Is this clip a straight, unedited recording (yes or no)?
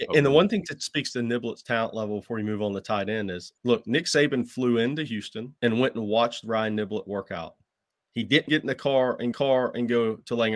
no